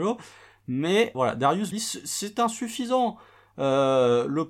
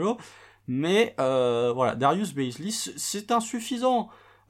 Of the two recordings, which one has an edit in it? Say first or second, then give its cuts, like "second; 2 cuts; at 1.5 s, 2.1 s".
first; 2 cuts; at 1.1 s, 1.7 s